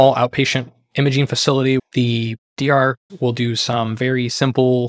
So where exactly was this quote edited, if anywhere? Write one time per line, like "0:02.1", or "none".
0:01.8
0:03.1